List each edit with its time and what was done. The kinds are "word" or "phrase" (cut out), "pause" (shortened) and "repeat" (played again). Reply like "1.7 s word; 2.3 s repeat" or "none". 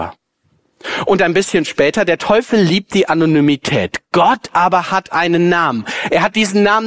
none

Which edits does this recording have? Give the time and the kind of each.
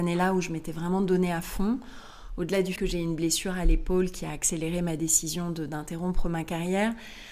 2.8 s word

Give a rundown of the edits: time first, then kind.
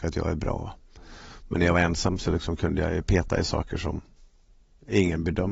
none

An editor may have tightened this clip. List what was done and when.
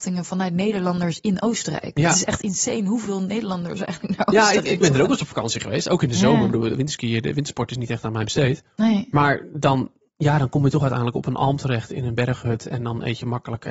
none

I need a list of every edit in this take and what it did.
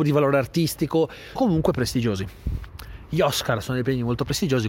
1.4 s word; 1.7 s word; 3.6 s word

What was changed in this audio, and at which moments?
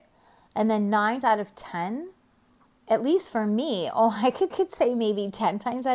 1.2 s word; 4.5 s repeat

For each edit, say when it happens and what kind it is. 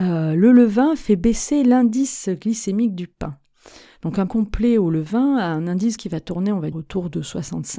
4.3 s word; 6.0 s word; 6.7 s word

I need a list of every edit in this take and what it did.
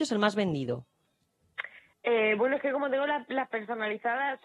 none

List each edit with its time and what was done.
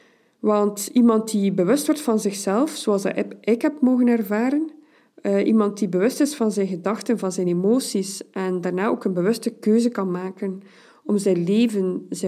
none

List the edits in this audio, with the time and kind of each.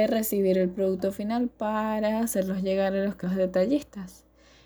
3.2 s word

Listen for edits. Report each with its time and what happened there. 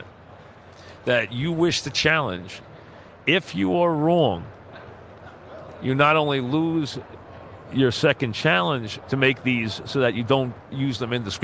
9.0 s phrase

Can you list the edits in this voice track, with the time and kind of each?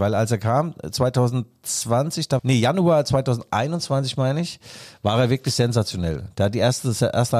2.4 s phrase

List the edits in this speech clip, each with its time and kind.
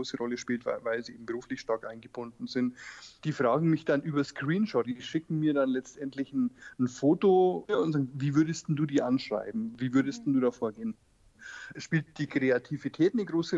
4.8 s word

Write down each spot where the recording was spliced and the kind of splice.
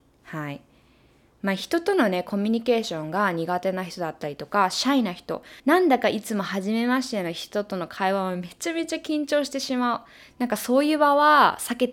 5.6 s pause

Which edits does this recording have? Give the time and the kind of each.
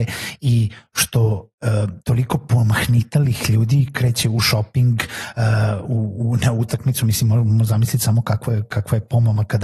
none

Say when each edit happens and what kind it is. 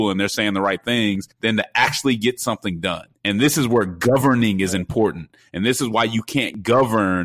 1.3 s pause; 3.1 s pause

